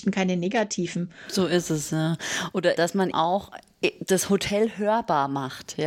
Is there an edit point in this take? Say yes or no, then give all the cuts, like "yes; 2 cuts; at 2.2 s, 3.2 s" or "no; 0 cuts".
yes; 2 cuts; at 2.8 s, 3.1 s